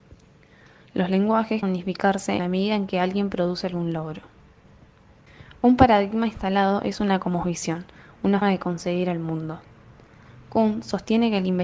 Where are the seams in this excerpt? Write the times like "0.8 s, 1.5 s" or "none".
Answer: 1.6 s, 2.4 s, 8.4 s